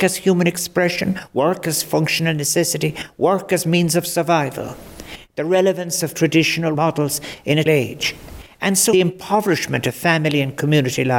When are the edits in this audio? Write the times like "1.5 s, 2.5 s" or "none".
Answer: 6.7 s, 7.7 s, 8.9 s